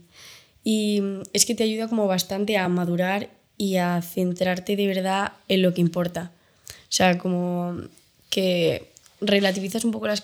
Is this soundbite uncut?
yes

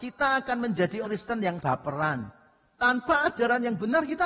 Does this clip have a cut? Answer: yes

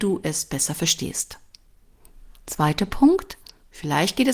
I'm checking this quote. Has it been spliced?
yes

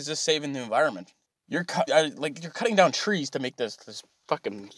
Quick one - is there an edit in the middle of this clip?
yes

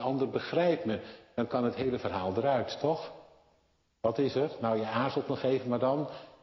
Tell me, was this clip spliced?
no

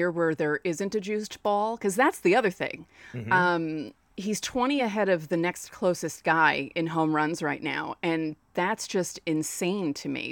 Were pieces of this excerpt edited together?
no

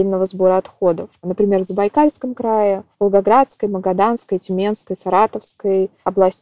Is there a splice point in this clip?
no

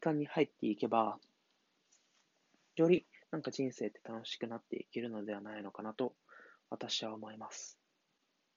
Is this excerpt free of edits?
yes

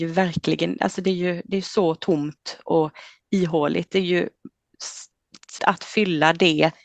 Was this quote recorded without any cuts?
no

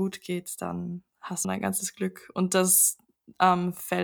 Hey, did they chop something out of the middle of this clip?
yes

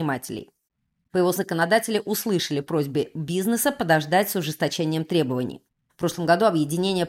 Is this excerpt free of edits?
no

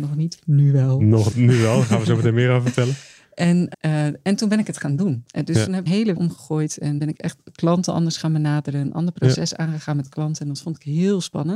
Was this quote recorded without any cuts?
no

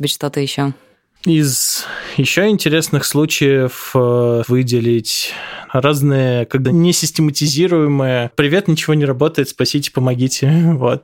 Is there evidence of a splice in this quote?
yes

